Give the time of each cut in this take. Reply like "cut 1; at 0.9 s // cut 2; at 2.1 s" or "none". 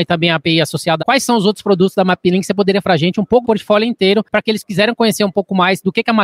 cut 1; at 1.0 s // cut 2; at 2.8 s // cut 3; at 3.4 s